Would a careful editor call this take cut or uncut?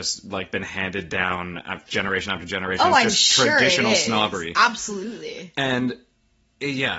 uncut